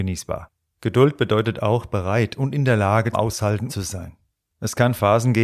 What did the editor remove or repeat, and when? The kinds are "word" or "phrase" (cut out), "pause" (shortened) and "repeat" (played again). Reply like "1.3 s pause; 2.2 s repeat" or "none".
3.1 s word; 3.7 s phrase